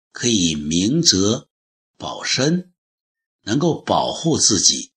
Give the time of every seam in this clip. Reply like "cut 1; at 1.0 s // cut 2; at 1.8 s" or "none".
none